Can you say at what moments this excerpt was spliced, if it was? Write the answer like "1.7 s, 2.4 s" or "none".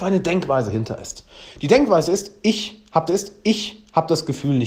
3.1 s